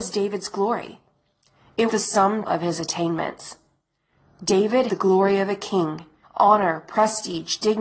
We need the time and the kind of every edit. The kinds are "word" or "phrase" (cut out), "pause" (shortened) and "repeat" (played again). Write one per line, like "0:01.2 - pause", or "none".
0:01.9 - word
0:02.5 - word
0:04.9 - word
0:06.2 - word